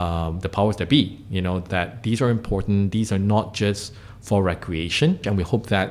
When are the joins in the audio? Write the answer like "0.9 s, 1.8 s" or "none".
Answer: none